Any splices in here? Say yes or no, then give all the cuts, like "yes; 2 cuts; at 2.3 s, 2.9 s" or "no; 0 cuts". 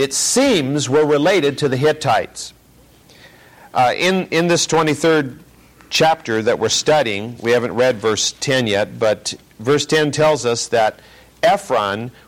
no; 0 cuts